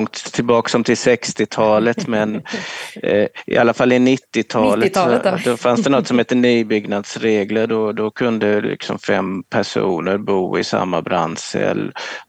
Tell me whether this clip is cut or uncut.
uncut